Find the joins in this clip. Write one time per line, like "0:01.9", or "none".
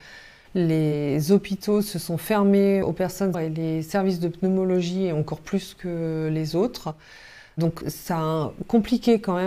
0:02.8
0:03.3
0:07.8